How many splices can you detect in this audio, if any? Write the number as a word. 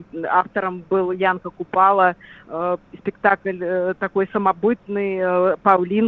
zero